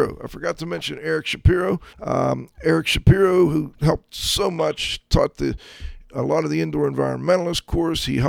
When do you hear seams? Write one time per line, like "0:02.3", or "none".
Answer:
0:01.9